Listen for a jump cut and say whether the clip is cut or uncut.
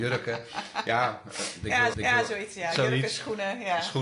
cut